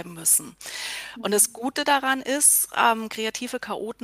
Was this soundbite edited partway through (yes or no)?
no